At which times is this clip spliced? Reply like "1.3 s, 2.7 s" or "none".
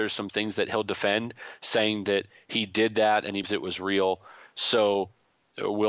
3.4 s